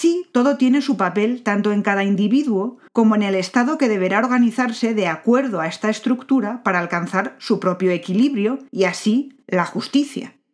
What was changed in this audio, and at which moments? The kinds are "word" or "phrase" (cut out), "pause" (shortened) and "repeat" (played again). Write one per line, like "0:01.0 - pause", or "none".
0:02.9 - pause
0:08.7 - pause
0:09.4 - pause